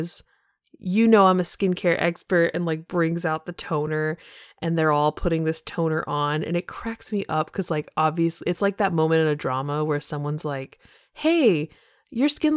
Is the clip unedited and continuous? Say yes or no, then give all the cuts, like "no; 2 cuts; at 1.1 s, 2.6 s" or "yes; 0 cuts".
no; 1 cut; at 11.0 s